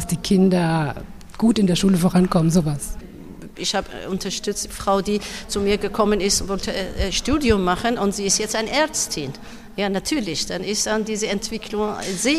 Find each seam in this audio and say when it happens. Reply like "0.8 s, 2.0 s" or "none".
none

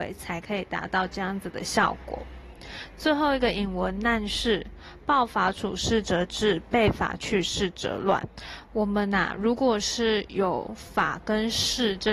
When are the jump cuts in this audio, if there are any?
none

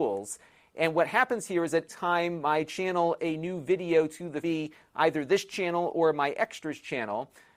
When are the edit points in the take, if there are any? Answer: 1.9 s, 3.2 s, 4.4 s

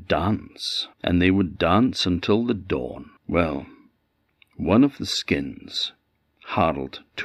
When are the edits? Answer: 0.9 s, 3.2 s

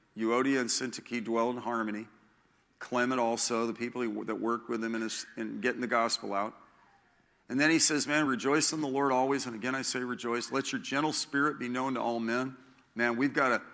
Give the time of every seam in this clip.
none

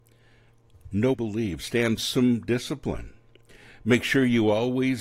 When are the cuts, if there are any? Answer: 1.1 s, 2.0 s

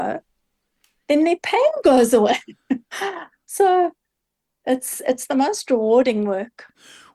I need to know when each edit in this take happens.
none

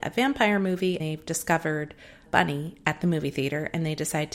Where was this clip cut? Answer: 1.0 s, 2.3 s

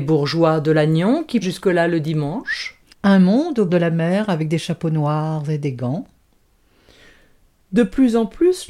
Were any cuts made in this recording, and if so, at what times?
1.4 s, 2.9 s, 3.7 s

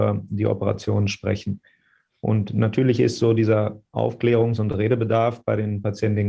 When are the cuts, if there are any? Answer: none

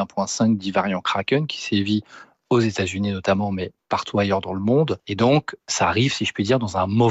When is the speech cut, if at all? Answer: none

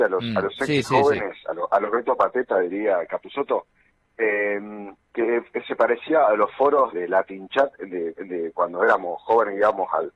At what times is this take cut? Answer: 5.0 s, 6.9 s, 8.2 s

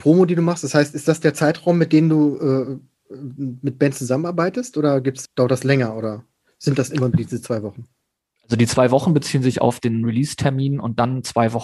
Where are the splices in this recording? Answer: 5.3 s

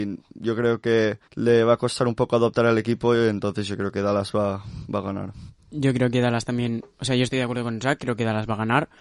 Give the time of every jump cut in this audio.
1.3 s, 5.6 s

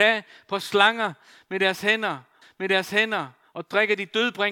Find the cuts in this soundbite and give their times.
2.4 s

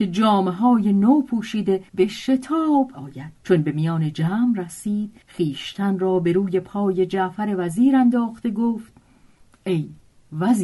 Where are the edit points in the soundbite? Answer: 1.9 s, 2.9 s, 3.4 s, 5.2 s

